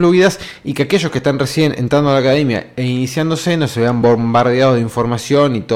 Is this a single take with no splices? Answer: yes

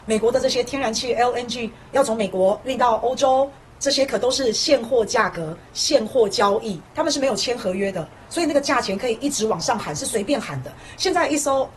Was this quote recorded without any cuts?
yes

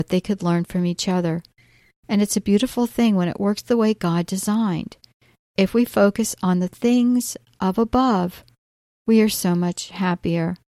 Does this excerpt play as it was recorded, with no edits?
yes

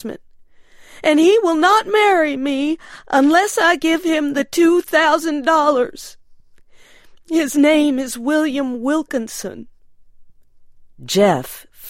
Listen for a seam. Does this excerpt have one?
no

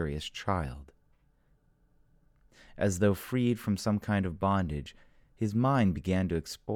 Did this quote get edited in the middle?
no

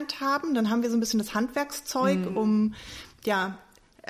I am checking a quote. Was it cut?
no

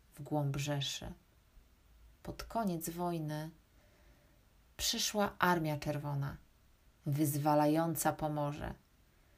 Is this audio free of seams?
yes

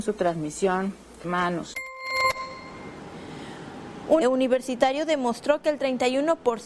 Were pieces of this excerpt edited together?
yes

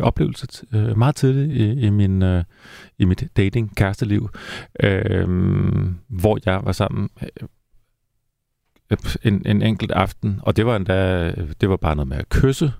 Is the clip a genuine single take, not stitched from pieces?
yes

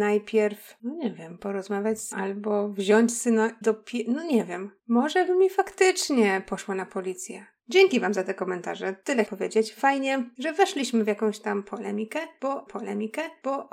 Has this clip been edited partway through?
yes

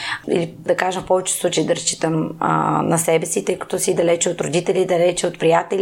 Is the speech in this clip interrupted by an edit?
no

